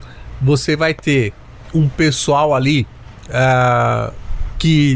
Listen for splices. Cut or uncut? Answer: uncut